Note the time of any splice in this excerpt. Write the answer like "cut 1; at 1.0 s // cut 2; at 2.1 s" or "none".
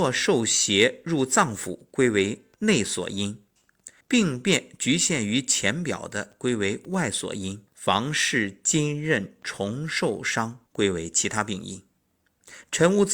cut 1; at 2.5 s // cut 2; at 4.0 s // cut 3; at 7.7 s // cut 4; at 10.7 s